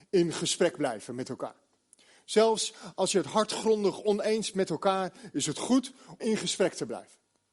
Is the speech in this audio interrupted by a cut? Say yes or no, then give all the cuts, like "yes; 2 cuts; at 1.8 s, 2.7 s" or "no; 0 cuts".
yes; 2 cuts; at 4.5 s, 6.2 s